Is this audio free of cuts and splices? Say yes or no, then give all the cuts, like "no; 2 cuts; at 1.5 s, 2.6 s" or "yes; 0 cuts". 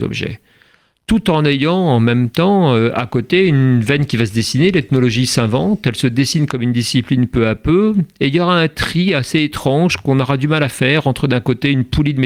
yes; 0 cuts